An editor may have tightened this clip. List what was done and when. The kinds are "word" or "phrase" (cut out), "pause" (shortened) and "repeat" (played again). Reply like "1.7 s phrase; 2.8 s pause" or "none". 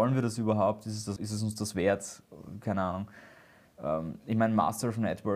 1.2 s word